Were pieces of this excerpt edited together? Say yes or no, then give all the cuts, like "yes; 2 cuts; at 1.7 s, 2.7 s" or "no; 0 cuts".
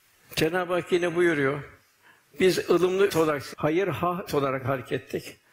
yes; 3 cuts; at 3.1 s, 3.5 s, 4.3 s